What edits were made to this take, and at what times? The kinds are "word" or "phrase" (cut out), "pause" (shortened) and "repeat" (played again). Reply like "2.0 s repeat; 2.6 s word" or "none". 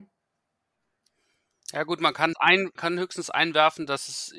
2.3 s word; 2.8 s word